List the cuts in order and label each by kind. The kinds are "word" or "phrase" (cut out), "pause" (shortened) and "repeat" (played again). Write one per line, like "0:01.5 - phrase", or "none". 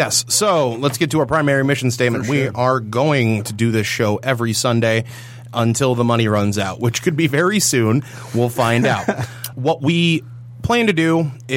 0:09.5 - word